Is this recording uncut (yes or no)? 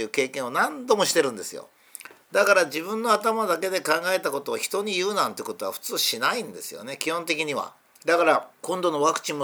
no